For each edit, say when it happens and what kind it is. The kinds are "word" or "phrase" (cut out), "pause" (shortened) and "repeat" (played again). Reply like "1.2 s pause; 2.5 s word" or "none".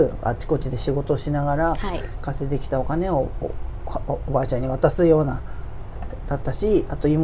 none